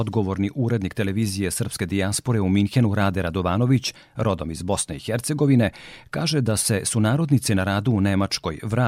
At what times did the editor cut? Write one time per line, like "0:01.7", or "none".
none